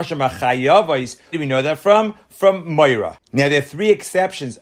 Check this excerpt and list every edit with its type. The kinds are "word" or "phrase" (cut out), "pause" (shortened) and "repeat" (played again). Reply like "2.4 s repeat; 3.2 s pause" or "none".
1.3 s word